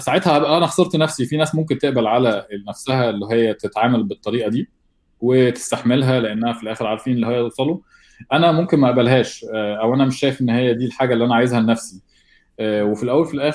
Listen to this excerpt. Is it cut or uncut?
uncut